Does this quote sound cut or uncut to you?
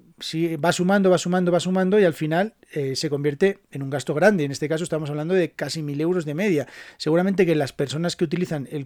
uncut